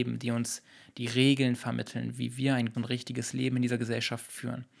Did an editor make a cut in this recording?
yes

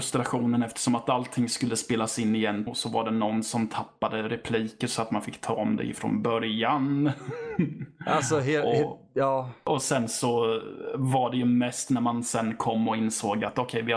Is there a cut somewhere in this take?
yes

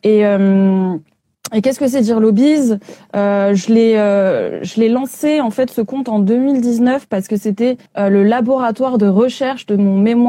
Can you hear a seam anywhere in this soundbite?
yes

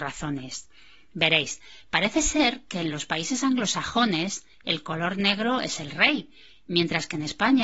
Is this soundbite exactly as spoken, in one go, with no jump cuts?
yes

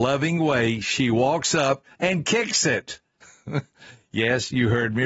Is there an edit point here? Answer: no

